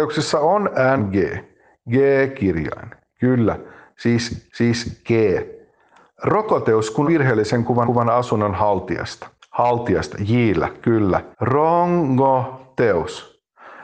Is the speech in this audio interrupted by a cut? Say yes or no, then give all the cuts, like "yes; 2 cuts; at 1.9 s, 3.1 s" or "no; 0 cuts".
yes; 6 cuts; at 1.0 s, 4.5 s, 7.0 s, 7.8 s, 9.4 s, 11.3 s